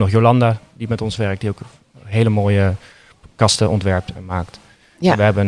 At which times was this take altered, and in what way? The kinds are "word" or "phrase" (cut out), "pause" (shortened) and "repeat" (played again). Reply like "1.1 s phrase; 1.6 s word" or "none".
none